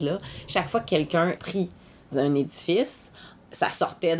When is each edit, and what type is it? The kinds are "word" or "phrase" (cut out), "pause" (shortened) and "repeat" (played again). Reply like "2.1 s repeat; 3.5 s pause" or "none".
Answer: 1.4 s word; 2.1 s word

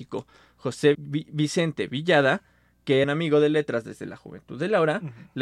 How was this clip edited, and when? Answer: 0.9 s word; 3.0 s phrase

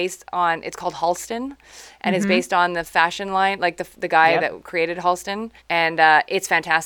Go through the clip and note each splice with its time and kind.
5.6 s pause

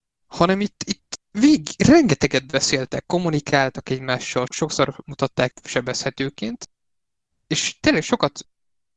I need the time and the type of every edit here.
1.3 s word; 4.5 s word; 5.5 s word

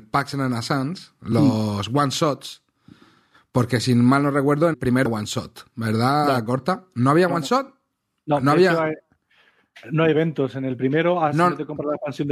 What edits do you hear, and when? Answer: 4.7 s word; 5.1 s word

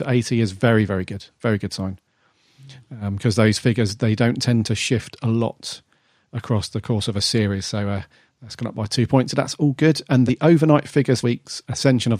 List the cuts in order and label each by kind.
10.3 s word; 11.2 s phrase

